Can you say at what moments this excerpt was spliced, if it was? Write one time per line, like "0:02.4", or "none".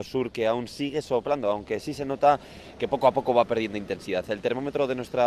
none